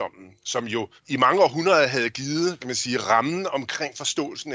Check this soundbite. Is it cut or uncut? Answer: cut